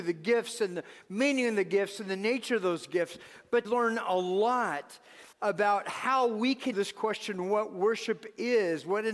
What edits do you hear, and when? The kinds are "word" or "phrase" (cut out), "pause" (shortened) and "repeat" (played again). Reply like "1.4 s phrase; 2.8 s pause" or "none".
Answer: 3.6 s phrase; 5.3 s pause; 6.7 s word